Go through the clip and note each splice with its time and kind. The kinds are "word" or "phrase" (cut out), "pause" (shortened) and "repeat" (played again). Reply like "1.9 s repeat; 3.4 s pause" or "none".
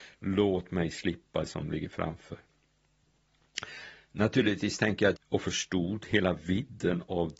1.5 s word; 5.2 s phrase